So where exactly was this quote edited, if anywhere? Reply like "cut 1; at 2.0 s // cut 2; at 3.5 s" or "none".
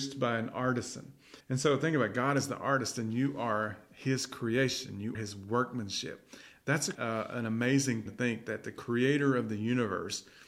cut 1; at 1.4 s // cut 2; at 5.1 s // cut 3; at 6.9 s // cut 4; at 8.1 s

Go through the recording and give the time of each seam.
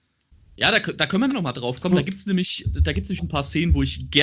cut 1; at 1.3 s // cut 2; at 2.6 s // cut 3; at 3.2 s

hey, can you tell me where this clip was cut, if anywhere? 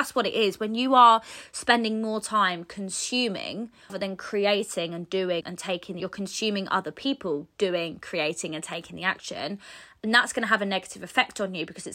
cut 1; at 3.9 s // cut 2; at 5.4 s // cut 3; at 6.0 s

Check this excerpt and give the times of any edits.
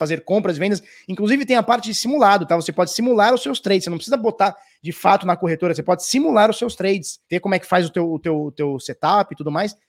cut 1; at 7.2 s

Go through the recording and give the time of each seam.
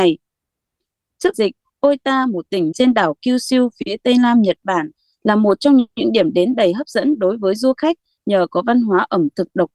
cut 1; at 1.3 s // cut 2; at 2.7 s

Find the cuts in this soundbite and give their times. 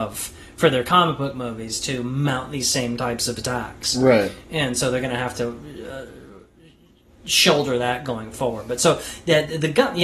none

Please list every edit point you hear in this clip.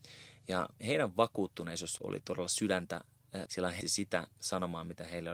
cut 1; at 2.0 s // cut 2; at 3.5 s // cut 3; at 3.8 s

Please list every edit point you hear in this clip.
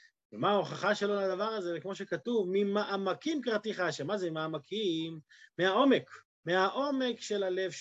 cut 1; at 6.2 s

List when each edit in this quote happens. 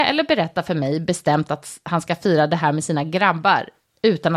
none

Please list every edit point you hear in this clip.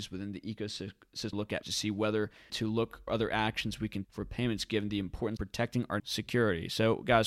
cut 1; at 1.3 s // cut 2; at 1.6 s // cut 3; at 2.5 s // cut 4; at 3.1 s // cut 5; at 4.0 s // cut 6; at 5.4 s // cut 7; at 6.0 s

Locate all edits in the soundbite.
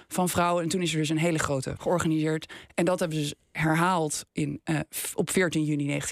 cut 1; at 1.8 s

